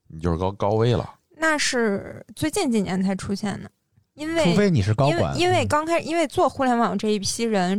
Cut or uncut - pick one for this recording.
uncut